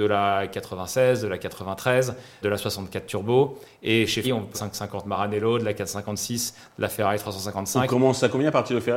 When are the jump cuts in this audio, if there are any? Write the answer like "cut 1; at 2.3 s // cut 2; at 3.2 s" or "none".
cut 1; at 2.4 s // cut 2; at 4.2 s // cut 3; at 4.5 s

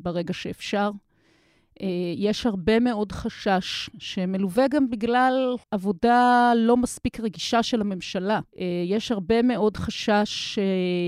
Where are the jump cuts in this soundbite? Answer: cut 1; at 5.6 s // cut 2; at 8.5 s

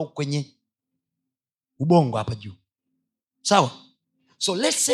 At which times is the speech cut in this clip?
none

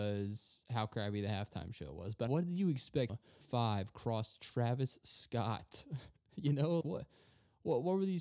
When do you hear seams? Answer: cut 1; at 2.3 s // cut 2; at 3.1 s // cut 3; at 3.4 s // cut 4; at 6.8 s

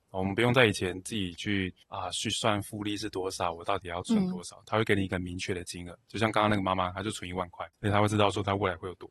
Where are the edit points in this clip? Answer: cut 1; at 1.8 s // cut 2; at 7.7 s

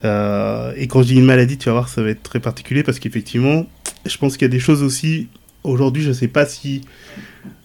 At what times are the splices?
none

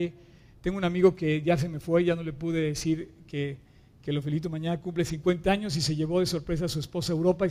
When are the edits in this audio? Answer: none

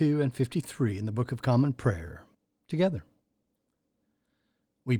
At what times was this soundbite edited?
cut 1; at 2.3 s

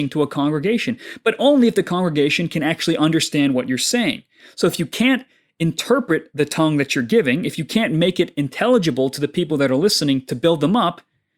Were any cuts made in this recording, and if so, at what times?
none

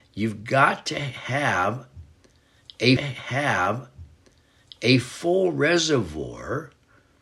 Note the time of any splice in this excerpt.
cut 1; at 3.0 s

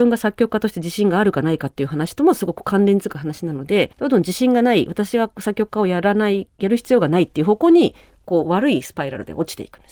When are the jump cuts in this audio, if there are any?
cut 1; at 3.9 s

